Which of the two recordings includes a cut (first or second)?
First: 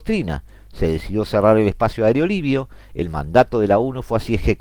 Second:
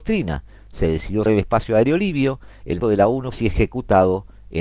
second